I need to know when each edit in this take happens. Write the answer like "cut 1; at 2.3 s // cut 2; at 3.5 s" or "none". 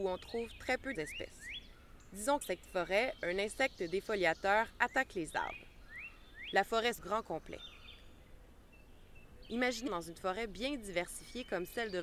cut 1; at 1.0 s // cut 2; at 2.4 s // cut 3; at 7.0 s // cut 4; at 9.9 s